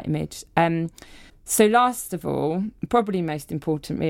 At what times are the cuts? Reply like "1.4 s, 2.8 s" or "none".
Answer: 1.3 s